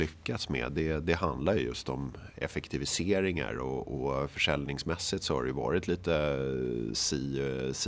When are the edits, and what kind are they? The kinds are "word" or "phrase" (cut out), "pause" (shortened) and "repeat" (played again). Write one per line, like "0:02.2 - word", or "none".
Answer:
none